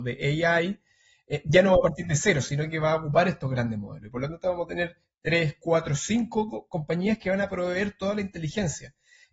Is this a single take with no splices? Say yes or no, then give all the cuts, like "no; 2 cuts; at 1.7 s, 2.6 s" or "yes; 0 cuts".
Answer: yes; 0 cuts